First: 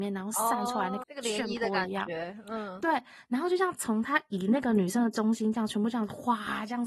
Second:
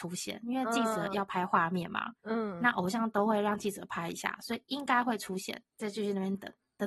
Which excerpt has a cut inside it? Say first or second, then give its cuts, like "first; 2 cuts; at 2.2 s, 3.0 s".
first; 1 cut; at 1.0 s